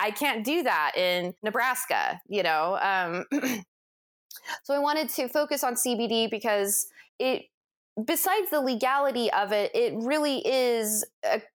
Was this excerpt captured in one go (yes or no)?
no